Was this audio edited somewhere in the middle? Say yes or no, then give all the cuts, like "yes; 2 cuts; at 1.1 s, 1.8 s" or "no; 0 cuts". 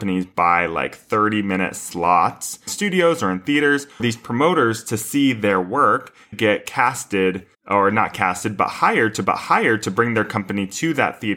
yes; 5 cuts; at 2.7 s, 4.0 s, 6.3 s, 7.5 s, 9.2 s